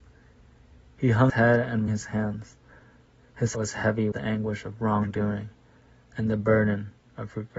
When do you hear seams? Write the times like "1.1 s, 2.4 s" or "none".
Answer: 1.3 s, 1.9 s, 3.5 s, 4.1 s